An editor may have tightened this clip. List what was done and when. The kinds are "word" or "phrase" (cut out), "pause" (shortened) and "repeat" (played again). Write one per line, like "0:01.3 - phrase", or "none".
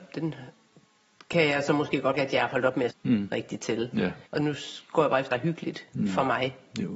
0:02.1 - word
0:02.9 - word
0:04.2 - pause
0:05.3 - word